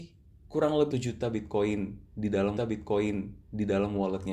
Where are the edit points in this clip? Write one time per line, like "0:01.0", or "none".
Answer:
0:00.9
0:02.6